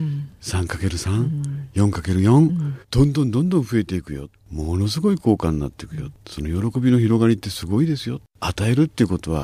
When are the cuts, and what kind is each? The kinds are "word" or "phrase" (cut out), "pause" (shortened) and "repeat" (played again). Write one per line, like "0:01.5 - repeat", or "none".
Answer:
0:02.8 - pause